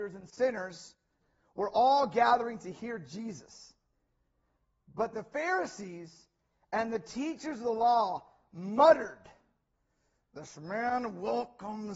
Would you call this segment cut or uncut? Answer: uncut